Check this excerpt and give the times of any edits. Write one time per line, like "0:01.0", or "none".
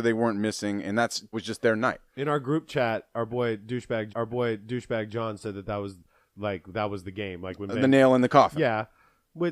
0:01.3
0:02.1
0:04.1